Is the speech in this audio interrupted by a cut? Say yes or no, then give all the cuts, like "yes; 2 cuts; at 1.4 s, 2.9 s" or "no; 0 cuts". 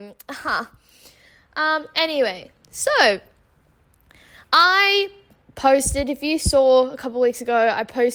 no; 0 cuts